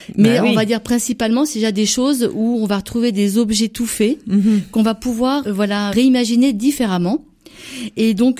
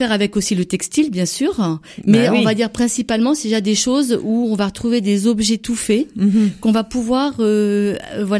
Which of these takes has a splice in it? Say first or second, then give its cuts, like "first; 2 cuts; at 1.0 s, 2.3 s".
first; 2 cuts; at 5.4 s, 5.9 s